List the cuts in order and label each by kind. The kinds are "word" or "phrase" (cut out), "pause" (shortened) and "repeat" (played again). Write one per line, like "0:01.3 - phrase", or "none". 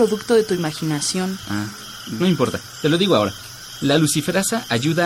0:02.2 - word